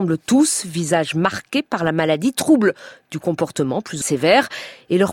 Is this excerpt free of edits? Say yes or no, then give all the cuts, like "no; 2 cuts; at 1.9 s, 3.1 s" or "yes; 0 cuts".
no; 1 cut; at 4.0 s